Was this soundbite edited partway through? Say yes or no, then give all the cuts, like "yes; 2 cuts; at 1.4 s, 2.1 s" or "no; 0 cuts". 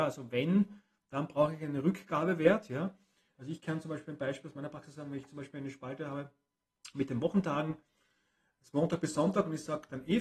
no; 0 cuts